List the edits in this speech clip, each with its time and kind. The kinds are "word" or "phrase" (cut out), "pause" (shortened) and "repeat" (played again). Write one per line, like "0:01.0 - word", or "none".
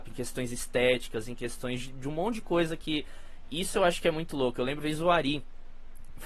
0:04.8 - word